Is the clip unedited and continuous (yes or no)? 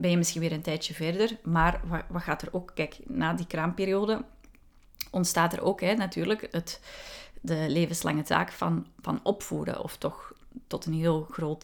yes